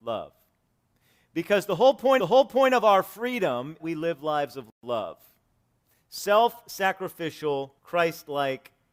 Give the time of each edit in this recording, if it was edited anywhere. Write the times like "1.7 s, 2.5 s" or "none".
2.2 s, 3.8 s, 7.8 s

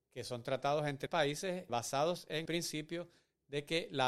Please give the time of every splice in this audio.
1.1 s, 1.7 s, 2.5 s

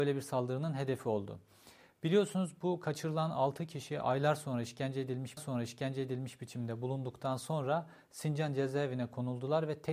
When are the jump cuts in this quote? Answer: 5.4 s

